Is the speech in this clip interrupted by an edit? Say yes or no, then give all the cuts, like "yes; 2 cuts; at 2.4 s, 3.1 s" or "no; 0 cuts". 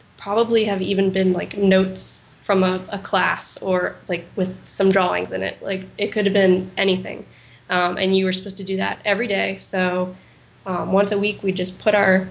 yes; 1 cut; at 2.3 s